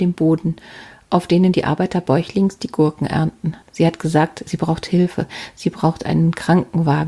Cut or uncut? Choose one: cut